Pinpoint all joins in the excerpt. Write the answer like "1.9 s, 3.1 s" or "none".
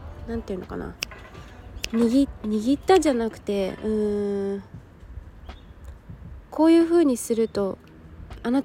6.5 s